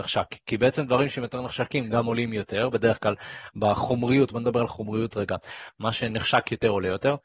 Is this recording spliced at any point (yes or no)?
no